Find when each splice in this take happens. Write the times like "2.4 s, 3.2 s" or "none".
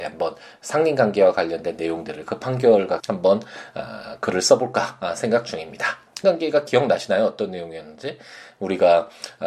3.0 s, 6.2 s